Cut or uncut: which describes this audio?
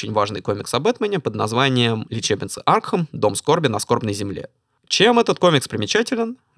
uncut